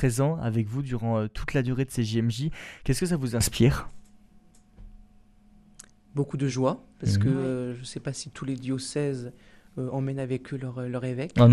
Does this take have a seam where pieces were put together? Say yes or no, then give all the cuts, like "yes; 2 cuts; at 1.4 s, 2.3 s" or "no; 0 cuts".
no; 0 cuts